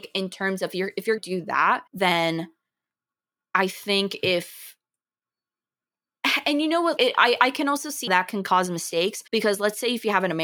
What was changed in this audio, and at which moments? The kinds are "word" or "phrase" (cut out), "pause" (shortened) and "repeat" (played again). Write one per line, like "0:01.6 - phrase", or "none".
0:01.2 - word
0:01.9 - pause
0:07.0 - word
0:08.1 - word
0:09.3 - pause

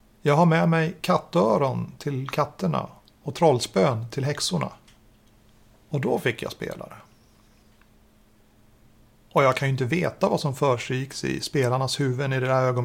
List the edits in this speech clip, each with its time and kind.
none

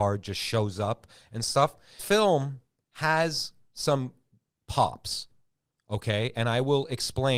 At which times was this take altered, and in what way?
0:02.0 - word

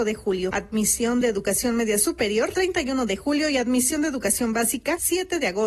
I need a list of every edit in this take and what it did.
none

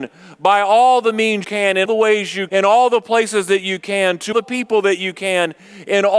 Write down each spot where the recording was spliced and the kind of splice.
0:01.4 - word
0:01.8 - word
0:02.5 - word
0:04.3 - word

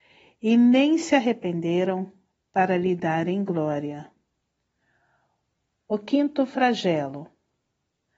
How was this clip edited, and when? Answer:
none

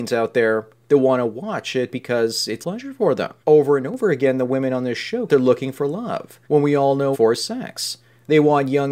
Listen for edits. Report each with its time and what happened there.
0:02.6 - phrase
0:03.4 - pause
0:05.3 - phrase
0:06.4 - pause
0:07.1 - phrase

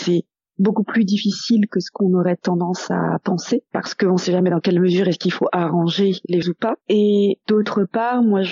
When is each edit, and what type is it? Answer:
0:06.4 - word
0:06.8 - pause

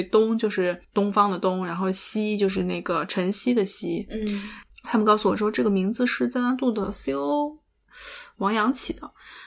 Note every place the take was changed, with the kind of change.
none

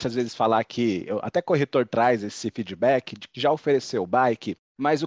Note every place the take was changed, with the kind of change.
none

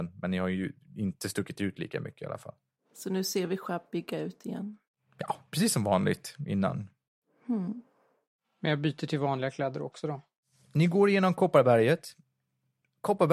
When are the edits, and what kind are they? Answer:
none

